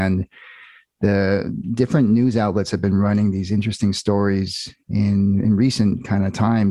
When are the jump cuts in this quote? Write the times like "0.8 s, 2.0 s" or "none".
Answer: 4.8 s